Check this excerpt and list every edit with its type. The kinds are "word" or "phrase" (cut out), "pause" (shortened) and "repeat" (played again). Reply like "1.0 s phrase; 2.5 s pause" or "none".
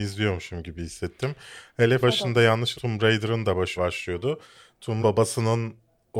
2.0 s word; 2.7 s word; 3.8 s word; 5.0 s word